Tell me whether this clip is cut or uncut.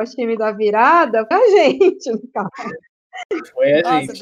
cut